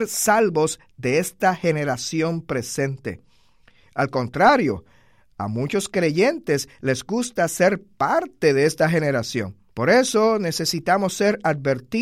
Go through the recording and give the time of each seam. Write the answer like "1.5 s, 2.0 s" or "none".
9.7 s